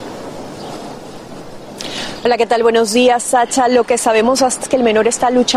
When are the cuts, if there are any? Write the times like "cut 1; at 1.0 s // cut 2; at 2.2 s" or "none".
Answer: cut 1; at 4.6 s